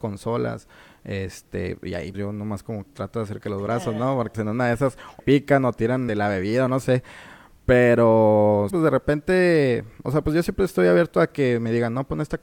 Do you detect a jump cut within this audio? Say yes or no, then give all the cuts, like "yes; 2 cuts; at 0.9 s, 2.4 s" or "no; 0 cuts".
yes; 7 cuts; at 2.1 s, 2.9 s, 3.4 s, 4.3 s, 5.2 s, 6.1 s, 8.7 s